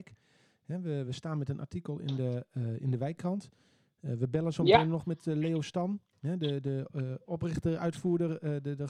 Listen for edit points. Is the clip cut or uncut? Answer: uncut